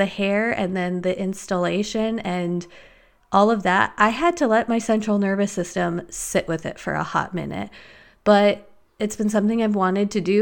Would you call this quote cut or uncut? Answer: uncut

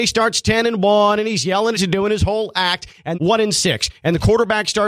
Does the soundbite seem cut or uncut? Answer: cut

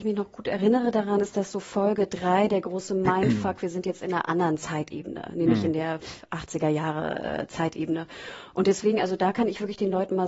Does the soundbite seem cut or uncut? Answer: uncut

